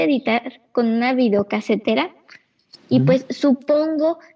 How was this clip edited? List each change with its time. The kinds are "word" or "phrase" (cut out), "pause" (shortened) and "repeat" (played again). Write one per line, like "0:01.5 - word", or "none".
none